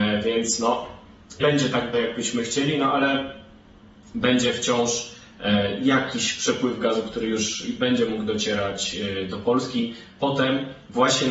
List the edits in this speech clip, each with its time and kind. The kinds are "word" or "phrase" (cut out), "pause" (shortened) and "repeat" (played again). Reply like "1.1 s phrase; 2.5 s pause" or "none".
1.4 s word; 1.9 s word